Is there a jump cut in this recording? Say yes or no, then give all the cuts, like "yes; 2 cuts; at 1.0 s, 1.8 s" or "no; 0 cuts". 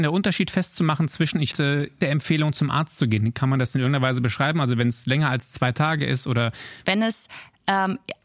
yes; 2 cuts; at 1.5 s, 6.0 s